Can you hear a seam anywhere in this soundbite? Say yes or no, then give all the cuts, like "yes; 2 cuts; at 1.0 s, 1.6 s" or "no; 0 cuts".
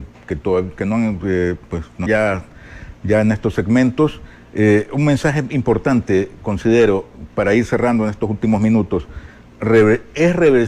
yes; 1 cut; at 2.1 s